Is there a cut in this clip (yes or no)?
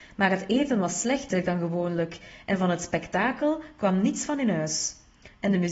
no